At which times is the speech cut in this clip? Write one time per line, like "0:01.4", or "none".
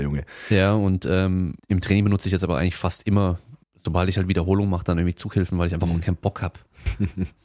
0:01.6
0:03.6